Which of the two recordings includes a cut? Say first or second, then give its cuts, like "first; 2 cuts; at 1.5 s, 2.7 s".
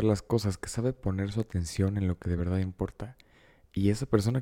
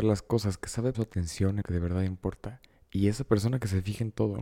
second; 3 cuts; at 0.9 s, 1.6 s, 2.7 s